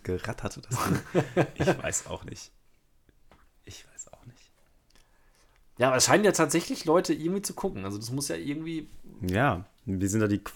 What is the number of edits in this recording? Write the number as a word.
zero